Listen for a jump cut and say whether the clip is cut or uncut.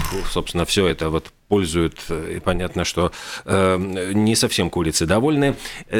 uncut